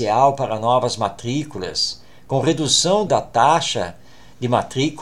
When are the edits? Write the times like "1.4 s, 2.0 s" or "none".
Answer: 3.1 s